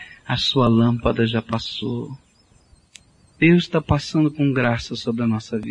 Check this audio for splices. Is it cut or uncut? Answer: uncut